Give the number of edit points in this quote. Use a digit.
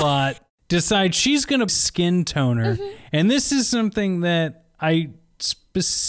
1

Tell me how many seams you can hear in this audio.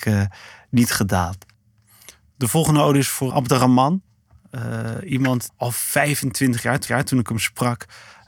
3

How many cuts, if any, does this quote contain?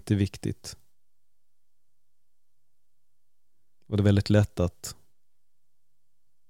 0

